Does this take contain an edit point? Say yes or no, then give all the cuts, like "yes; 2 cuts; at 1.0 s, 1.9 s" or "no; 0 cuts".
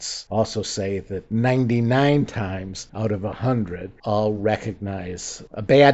no; 0 cuts